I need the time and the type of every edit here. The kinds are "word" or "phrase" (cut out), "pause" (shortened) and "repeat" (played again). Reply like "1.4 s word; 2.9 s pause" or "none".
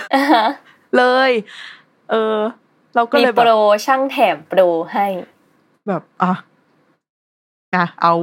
none